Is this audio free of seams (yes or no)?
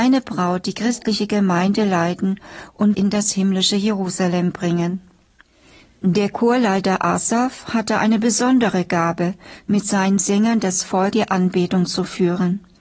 no